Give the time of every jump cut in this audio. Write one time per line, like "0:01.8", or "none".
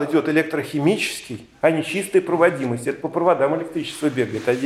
none